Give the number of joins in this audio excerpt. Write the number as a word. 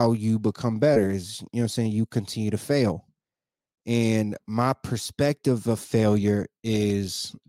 zero